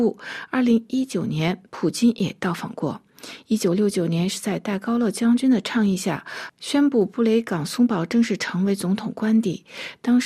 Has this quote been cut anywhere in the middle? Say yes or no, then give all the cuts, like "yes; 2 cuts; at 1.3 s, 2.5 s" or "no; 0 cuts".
yes; 1 cut; at 1.7 s